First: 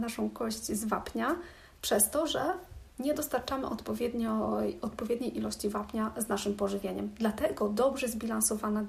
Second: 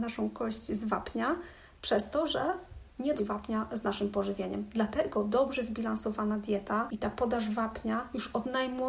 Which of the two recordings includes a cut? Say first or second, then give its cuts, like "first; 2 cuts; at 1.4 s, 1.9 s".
second; 1 cut; at 3.2 s